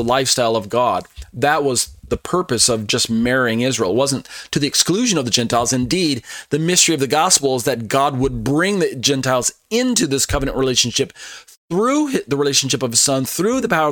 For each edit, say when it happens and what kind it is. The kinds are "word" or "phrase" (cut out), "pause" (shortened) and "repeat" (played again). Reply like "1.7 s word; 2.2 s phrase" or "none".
none